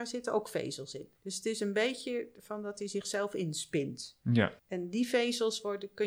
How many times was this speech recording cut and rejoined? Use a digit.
2